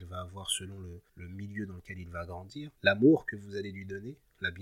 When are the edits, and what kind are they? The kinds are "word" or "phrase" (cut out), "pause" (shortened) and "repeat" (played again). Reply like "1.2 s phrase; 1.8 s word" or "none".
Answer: 1.1 s pause; 2.8 s pause